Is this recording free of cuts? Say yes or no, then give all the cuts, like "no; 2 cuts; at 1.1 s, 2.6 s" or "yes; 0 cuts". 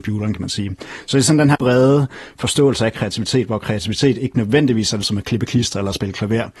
no; 2 cuts; at 1.5 s, 5.0 s